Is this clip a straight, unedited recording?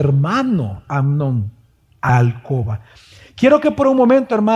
no; 1 cut; at 2.1 s

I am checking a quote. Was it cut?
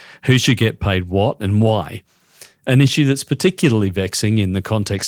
no; 0 cuts

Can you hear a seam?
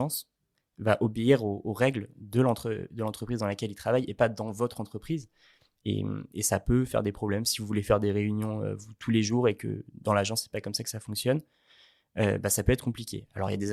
no; 0 cuts

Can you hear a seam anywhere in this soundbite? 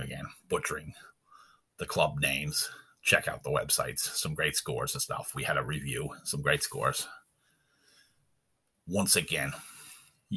no; 0 cuts

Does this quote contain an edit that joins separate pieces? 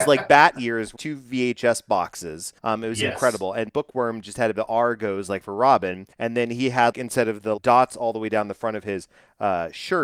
yes; 7 cuts; at 1.0 s, 2.6 s, 3.7 s, 4.5 s, 6.1 s, 6.9 s, 7.6 s

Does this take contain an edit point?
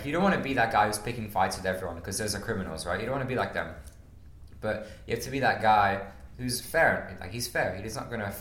yes; 1 cut; at 6.3 s

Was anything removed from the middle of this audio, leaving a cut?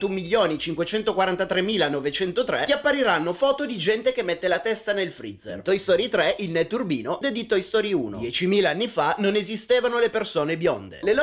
yes; 1 cut; at 7.2 s

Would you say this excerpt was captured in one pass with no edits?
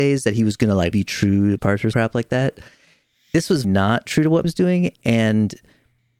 no; 5 cuts; at 0.9 s, 1.6 s, 1.9 s, 3.6 s, 4.4 s

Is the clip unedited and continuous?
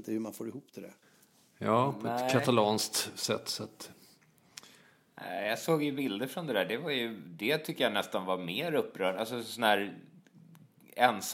yes; 0 cuts

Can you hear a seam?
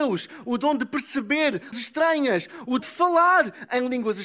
yes; 2 cuts; at 1.7 s, 2.8 s

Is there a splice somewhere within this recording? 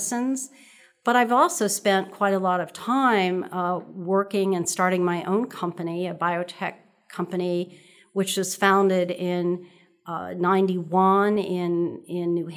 no; 0 cuts

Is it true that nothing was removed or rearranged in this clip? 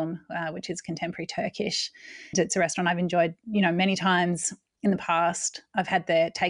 no; 1 cut; at 2.3 s

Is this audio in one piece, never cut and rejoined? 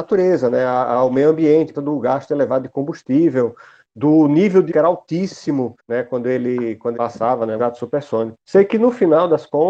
no; 6 cuts; at 1.7 s, 4.7 s, 5.8 s, 6.9 s, 7.6 s, 8.4 s

